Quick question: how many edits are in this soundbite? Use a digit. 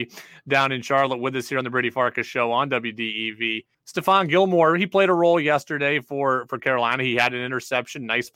1